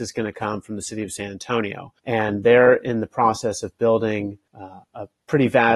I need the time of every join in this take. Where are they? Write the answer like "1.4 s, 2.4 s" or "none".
2.0 s, 4.5 s

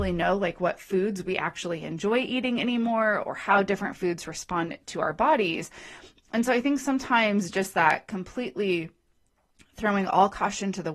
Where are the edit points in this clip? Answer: none

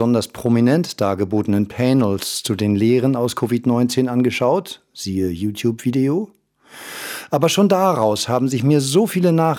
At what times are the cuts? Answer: none

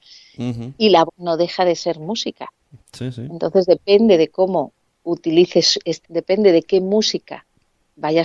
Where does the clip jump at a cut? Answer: 1.1 s, 6.0 s

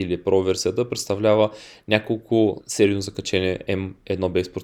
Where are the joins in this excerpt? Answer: 2.6 s

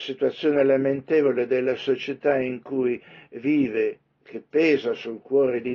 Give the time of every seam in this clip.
none

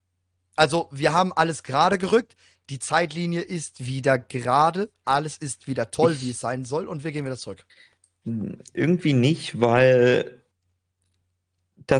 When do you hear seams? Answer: none

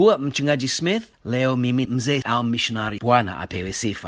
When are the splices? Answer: 1.1 s, 1.8 s, 2.2 s, 3.0 s

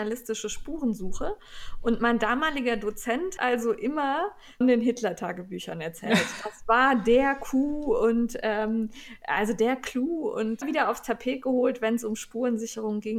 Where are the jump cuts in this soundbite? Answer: 3.4 s, 4.6 s, 10.6 s

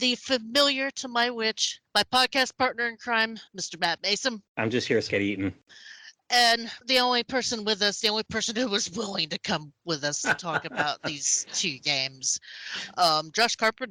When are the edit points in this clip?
3.5 s, 5.1 s, 6.8 s

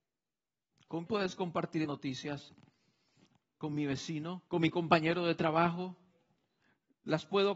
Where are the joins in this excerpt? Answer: 1.1 s, 1.8 s, 4.5 s

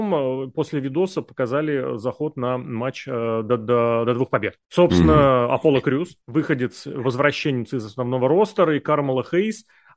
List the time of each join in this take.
4.6 s, 6.2 s

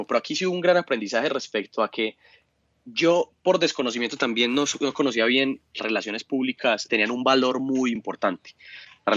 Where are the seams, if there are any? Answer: 5.8 s, 6.9 s, 8.0 s

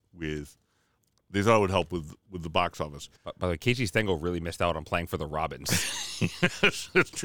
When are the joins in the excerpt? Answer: 3.2 s

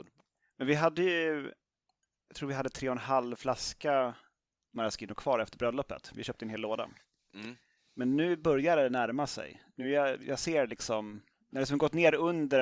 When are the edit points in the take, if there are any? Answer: none

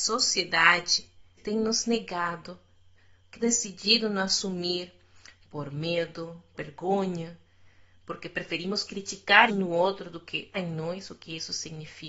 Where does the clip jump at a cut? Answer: 1.4 s, 3.4 s, 6.5 s, 9.5 s, 10.5 s

